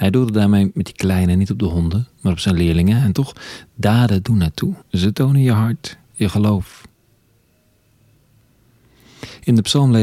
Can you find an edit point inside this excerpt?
yes; 2 cuts; at 4.8 s, 6.0 s

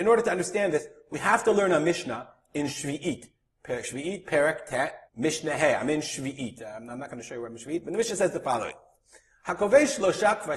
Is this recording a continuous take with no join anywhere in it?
no; 1 cut; at 5.1 s

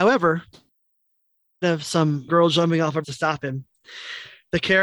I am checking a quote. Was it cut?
yes; 3 cuts; at 1.6 s, 2.3 s, 3.0 s

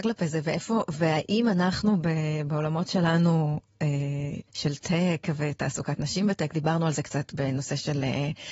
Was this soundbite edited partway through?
yes; 1 cut; at 4.5 s

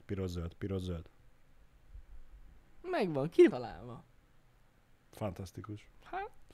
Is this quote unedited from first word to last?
no; 1 cut; at 3.5 s

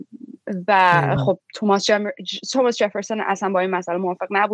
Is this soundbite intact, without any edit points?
yes; 0 cuts

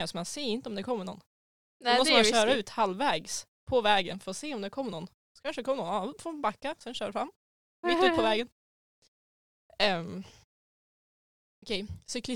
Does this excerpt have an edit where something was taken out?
no; 0 cuts

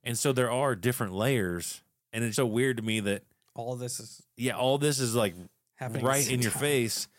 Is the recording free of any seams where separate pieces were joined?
no; 1 cut; at 2.3 s

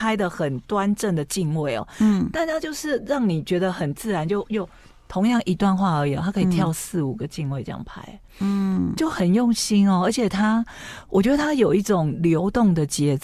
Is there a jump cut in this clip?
no; 0 cuts

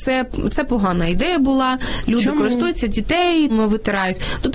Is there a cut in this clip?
yes; 1 cut; at 3.5 s

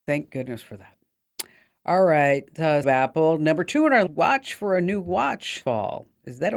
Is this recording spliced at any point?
yes; 3 cuts; at 2.8 s, 4.1 s, 5.6 s

